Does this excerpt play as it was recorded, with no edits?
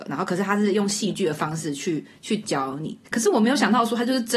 no; 1 cut; at 3.0 s

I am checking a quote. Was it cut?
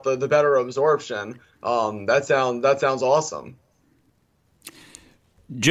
no; 0 cuts

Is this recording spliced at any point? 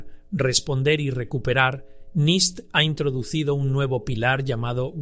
no; 0 cuts

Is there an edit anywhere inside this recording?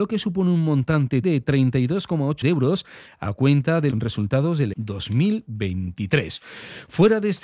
yes; 4 cuts; at 1.2 s, 2.4 s, 3.9 s, 4.7 s

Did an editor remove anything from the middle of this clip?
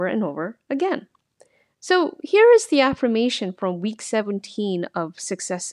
no; 0 cuts

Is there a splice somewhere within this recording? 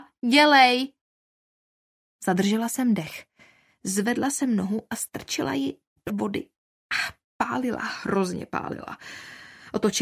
yes; 1 cut; at 6.1 s

